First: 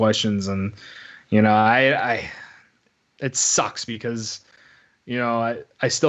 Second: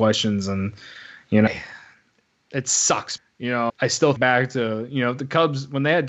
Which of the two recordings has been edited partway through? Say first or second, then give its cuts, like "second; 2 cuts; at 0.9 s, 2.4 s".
second; 4 cuts; at 1.5 s, 3.2 s, 3.7 s, 4.2 s